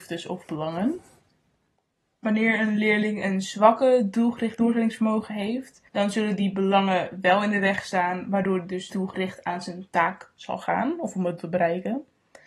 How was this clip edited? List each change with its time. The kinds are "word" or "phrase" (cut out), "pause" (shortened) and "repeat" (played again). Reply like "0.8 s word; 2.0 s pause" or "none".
5.9 s pause; 8.9 s word; 11.4 s word